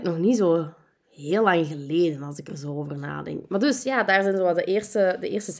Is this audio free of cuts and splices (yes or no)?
yes